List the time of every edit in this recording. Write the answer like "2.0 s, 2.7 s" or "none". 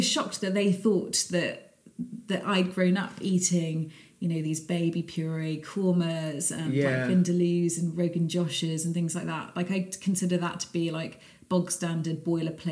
none